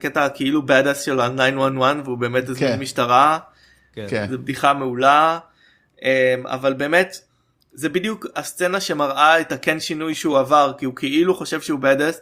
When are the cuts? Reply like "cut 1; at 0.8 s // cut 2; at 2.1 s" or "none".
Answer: none

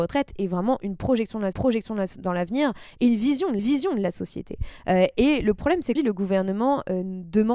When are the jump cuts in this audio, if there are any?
cut 1; at 1.5 s // cut 2; at 3.6 s // cut 3; at 6.0 s

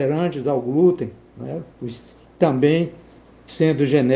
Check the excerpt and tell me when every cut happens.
cut 1; at 1.7 s

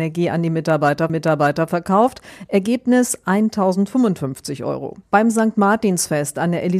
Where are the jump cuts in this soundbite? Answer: cut 1; at 1.1 s // cut 2; at 5.0 s

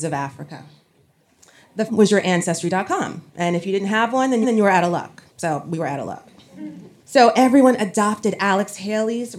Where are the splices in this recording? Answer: cut 1; at 1.9 s // cut 2; at 3.3 s // cut 3; at 4.4 s // cut 4; at 5.3 s // cut 5; at 7.0 s

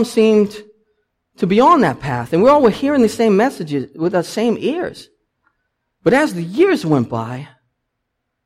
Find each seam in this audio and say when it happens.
none

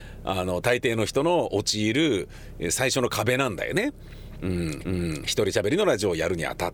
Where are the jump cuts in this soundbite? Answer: cut 1; at 4.8 s

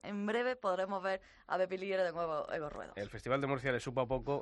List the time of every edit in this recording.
none

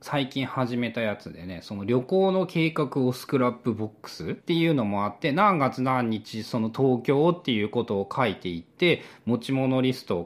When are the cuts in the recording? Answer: cut 1; at 4.4 s

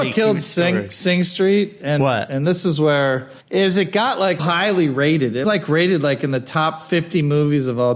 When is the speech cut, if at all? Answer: cut 1; at 3.4 s // cut 2; at 4.4 s // cut 3; at 5.4 s

